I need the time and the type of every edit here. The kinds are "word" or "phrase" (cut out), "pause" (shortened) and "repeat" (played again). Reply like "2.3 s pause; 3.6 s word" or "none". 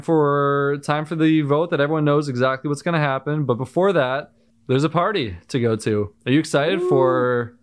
4.5 s pause

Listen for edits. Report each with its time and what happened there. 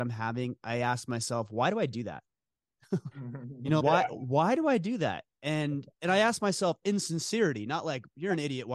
3.1 s word; 3.8 s word; 5.9 s pause

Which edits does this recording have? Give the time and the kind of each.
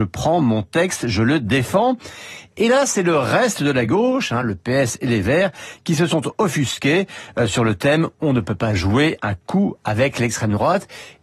none

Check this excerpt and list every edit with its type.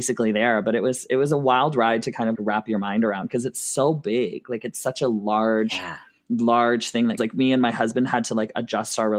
2.3 s word; 7.2 s word

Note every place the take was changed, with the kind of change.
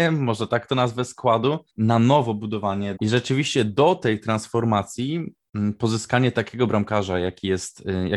1.7 s pause; 3.0 s word

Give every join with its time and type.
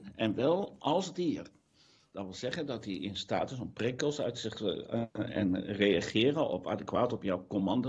none

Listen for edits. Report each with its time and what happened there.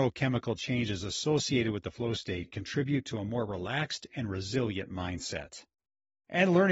none

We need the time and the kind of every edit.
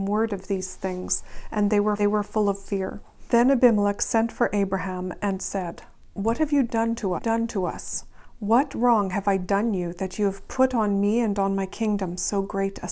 2.0 s repeat; 7.2 s repeat

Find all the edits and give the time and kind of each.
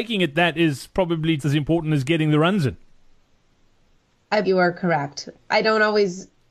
1.4 s word; 4.4 s phrase

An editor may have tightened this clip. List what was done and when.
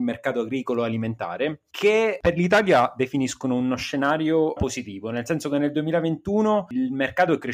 4.6 s word

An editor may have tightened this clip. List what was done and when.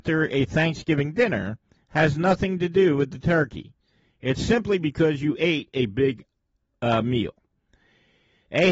none

